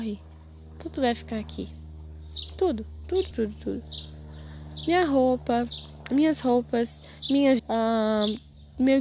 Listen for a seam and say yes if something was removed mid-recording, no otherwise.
yes